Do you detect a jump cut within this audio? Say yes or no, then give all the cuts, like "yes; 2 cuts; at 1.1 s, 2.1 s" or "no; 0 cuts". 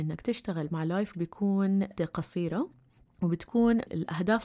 yes; 3 cuts; at 1.1 s, 2.0 s, 3.1 s